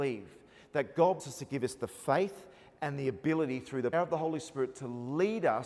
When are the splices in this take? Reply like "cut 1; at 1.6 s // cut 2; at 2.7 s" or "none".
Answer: cut 1; at 1.2 s // cut 2; at 3.9 s